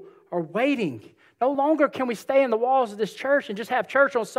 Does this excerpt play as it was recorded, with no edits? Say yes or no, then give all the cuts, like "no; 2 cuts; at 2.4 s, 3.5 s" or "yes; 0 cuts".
yes; 0 cuts